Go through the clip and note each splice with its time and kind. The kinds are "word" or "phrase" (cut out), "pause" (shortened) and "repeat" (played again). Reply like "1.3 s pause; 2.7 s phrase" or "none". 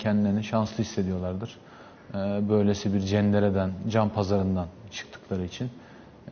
none